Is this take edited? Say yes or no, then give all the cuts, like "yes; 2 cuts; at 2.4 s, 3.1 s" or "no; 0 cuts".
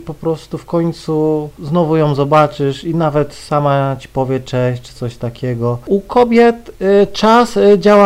no; 0 cuts